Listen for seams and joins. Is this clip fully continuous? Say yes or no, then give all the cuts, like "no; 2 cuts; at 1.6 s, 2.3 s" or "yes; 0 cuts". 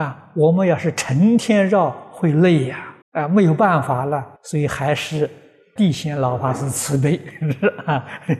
no; 3 cuts; at 3.0 s, 4.4 s, 5.8 s